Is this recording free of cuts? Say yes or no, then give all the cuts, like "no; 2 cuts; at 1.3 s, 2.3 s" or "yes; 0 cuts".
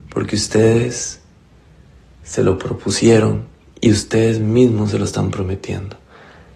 yes; 0 cuts